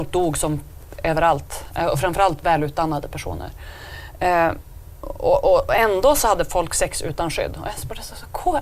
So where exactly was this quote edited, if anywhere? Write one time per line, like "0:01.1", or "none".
none

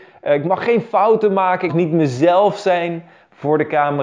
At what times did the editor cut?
0:01.7

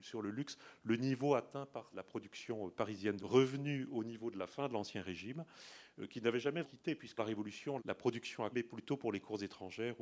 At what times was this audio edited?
0:01.9
0:03.2
0:06.6
0:07.2
0:07.8
0:08.5

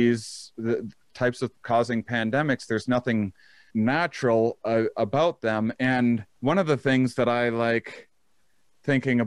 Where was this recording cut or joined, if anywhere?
0:01.5
0:03.7
0:06.4

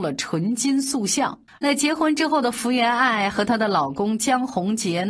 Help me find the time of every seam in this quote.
0:01.5

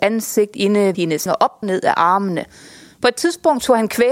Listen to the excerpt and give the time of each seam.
0:00.9
0:01.3
0:01.6

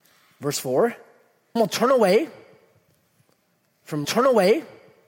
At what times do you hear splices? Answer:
0:01.6
0:04.0

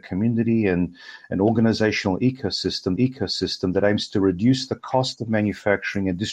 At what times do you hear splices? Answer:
0:03.0

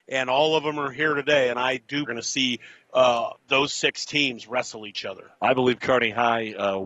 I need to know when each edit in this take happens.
0:02.1
0:03.4

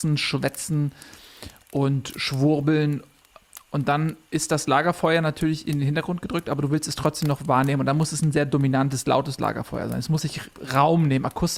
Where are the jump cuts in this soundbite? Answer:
none

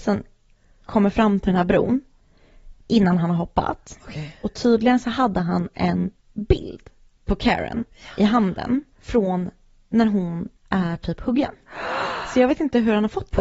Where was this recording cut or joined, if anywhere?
0:06.2
0:08.9
0:10.6

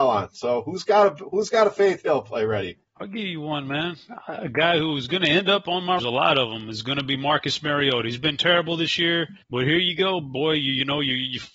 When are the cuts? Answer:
0:02.9
0:06.0
0:09.4

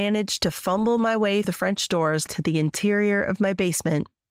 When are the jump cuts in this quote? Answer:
0:01.4
0:02.3

